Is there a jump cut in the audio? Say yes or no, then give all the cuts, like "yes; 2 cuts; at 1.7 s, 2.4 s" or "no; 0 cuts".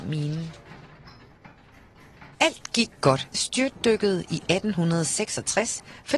yes; 2 cuts; at 2.3 s, 3.3 s